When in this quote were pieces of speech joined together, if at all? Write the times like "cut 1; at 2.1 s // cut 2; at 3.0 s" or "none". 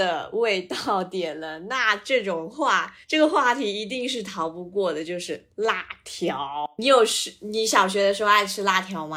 cut 1; at 3.0 s